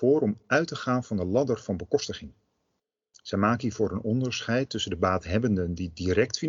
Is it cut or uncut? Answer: uncut